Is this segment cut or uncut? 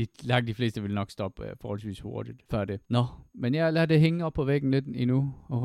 cut